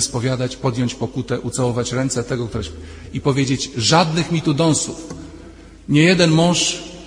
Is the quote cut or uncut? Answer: uncut